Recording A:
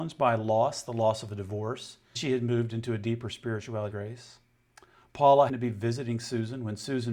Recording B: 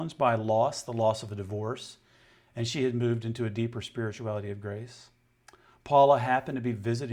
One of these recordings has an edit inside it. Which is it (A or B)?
A